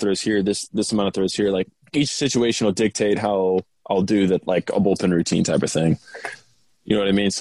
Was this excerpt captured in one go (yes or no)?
yes